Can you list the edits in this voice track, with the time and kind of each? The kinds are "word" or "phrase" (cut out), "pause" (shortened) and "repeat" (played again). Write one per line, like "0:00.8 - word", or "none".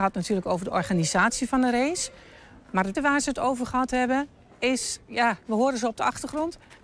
0:02.9 - word

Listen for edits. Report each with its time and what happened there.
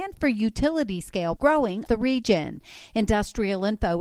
0:01.4 - phrase
0:01.9 - word

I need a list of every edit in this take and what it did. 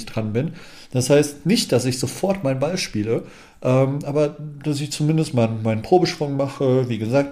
none

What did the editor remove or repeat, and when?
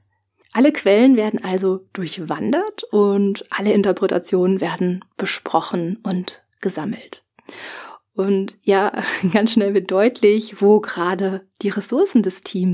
none

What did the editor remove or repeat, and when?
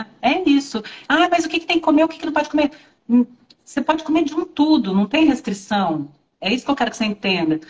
none

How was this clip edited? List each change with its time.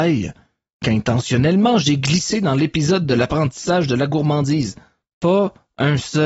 none

